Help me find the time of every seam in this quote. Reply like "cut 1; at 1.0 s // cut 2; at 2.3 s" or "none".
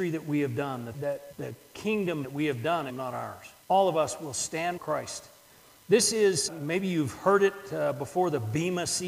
cut 1; at 0.9 s // cut 2; at 1.3 s // cut 3; at 2.2 s // cut 4; at 2.9 s // cut 5; at 3.6 s // cut 6; at 4.8 s // cut 7; at 6.5 s